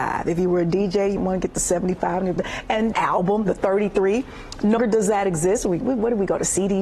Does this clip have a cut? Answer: yes; 5 cuts; at 1.2 s, 2.4 s, 2.9 s, 4.8 s, 5.8 s

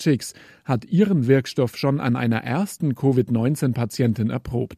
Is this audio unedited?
yes; 0 cuts

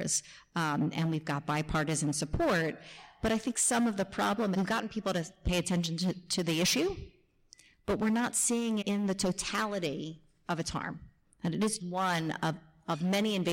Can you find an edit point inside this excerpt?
yes; 3 cuts; at 4.5 s, 8.8 s, 11.8 s

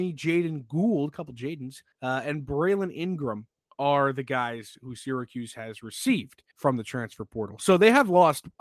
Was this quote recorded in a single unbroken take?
no; 3 cuts; at 1.9 s, 3.7 s, 6.5 s

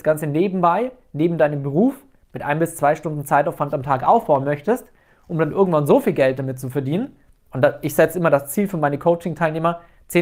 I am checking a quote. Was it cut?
no; 0 cuts

